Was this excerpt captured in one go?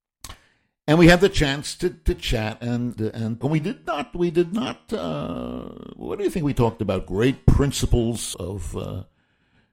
no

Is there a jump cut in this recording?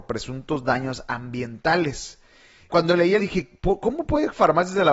yes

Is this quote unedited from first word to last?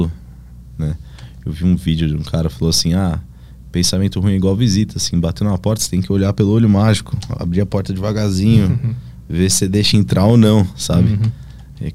yes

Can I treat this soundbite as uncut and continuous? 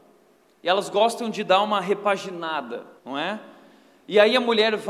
no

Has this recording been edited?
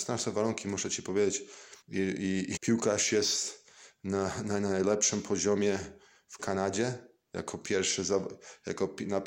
yes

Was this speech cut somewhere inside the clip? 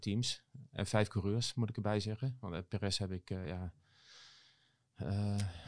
no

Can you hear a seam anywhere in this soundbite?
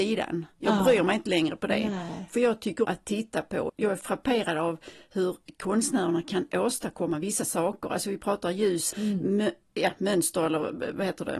yes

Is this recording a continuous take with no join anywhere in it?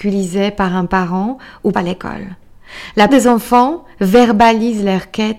no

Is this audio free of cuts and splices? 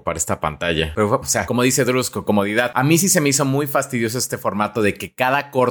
no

